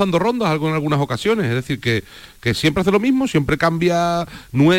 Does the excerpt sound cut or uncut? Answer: uncut